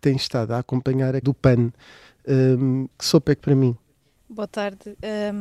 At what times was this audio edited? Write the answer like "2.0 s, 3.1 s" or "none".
1.2 s, 2.9 s, 3.4 s